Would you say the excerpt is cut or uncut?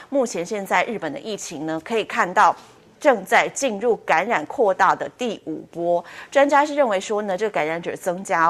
uncut